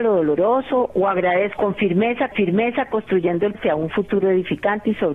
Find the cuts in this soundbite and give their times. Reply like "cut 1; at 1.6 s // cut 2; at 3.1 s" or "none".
cut 1; at 1.6 s // cut 2; at 2.3 s // cut 3; at 3.5 s

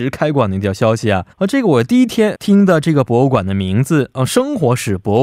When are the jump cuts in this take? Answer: cut 1; at 1.3 s // cut 2; at 2.3 s

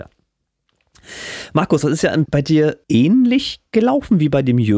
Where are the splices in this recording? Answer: cut 1; at 2.2 s // cut 2; at 2.8 s

